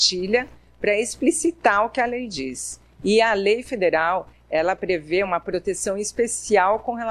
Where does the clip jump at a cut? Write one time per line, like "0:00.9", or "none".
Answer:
none